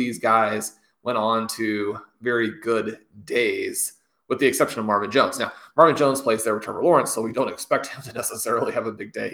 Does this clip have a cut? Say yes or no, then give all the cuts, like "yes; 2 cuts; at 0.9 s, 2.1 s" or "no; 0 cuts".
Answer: no; 0 cuts